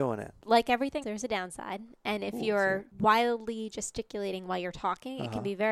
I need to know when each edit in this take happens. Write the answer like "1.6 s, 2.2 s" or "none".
1.0 s